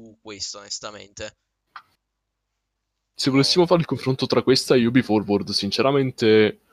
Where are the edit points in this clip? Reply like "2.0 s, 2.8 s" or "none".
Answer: none